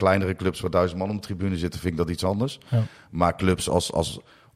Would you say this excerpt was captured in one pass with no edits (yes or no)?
yes